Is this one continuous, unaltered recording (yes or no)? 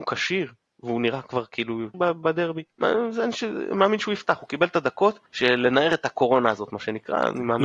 no